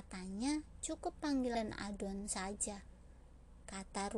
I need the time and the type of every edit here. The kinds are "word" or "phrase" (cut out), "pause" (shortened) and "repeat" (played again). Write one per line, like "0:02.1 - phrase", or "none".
0:01.5 - word